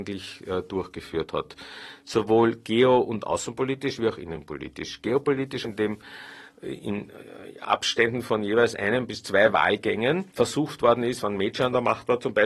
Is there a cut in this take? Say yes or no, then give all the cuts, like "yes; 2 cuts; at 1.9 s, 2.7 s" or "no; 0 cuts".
yes; 2 cuts; at 5.6 s, 10.3 s